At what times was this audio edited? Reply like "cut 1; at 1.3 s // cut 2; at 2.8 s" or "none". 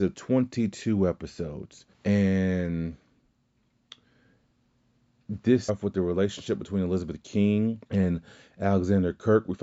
cut 1; at 1.9 s // cut 2; at 5.7 s // cut 3; at 7.9 s